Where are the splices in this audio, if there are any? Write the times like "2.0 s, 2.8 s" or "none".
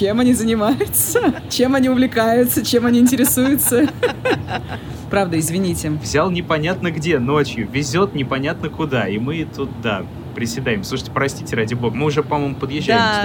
none

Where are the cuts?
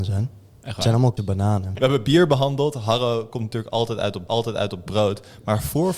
1.2 s, 4.3 s

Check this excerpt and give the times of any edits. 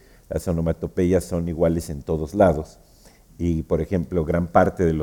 none

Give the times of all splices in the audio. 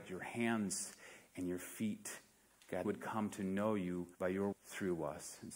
2.8 s, 4.1 s, 4.5 s

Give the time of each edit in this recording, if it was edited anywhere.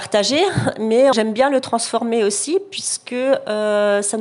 1.1 s

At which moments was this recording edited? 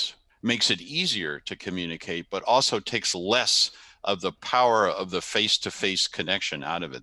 none

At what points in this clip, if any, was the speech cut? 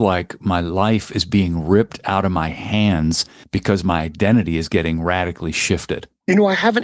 none

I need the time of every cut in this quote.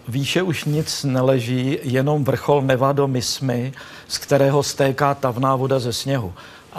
none

